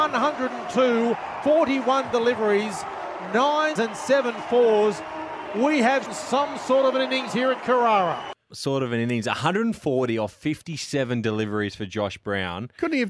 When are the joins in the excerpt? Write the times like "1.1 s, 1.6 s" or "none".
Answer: 1.4 s, 3.8 s, 6.1 s, 8.5 s